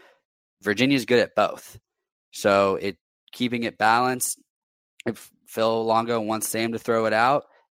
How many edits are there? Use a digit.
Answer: 0